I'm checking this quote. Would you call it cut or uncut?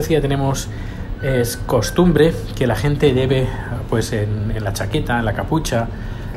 uncut